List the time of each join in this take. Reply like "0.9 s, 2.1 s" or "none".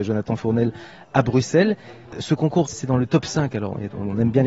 2.7 s